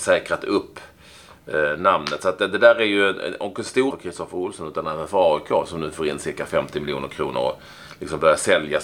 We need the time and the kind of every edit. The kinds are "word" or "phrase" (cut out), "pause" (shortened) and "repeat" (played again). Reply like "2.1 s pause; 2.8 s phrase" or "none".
3.9 s phrase